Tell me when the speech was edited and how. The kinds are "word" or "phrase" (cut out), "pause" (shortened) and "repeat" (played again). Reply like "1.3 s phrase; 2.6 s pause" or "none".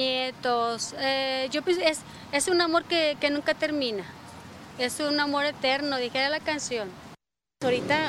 none

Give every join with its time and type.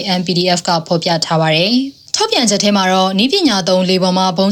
2.1 s pause

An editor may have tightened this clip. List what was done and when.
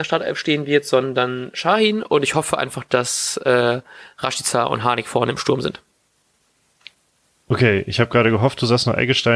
none

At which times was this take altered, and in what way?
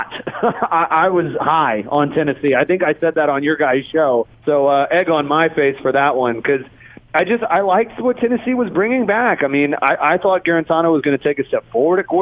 4.3 s pause

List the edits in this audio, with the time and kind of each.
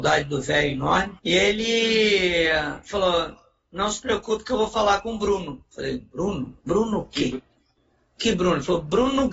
1.2 s pause; 6.6 s pause

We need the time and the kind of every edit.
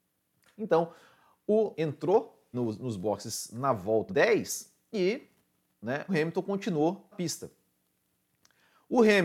1.7 s word; 2.5 s word; 4.1 s word; 6.1 s word; 7.1 s word

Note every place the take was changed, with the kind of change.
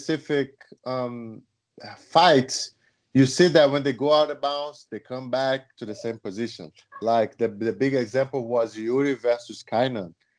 none

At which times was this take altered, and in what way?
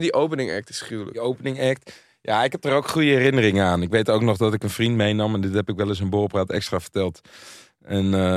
none

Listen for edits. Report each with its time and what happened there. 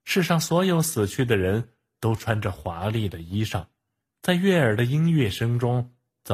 none

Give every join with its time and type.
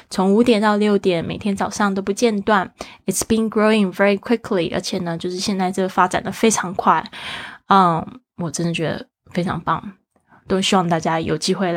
8.3 s pause

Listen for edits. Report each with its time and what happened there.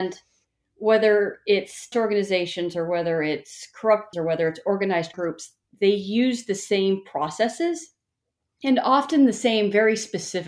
1.9 s word; 4.1 s word; 5.1 s word

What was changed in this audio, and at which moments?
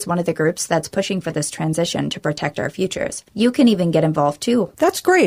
none

